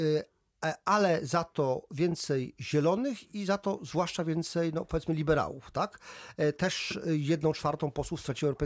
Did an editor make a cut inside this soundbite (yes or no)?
no